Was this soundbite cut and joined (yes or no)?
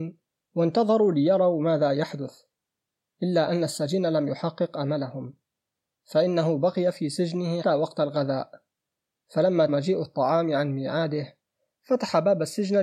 yes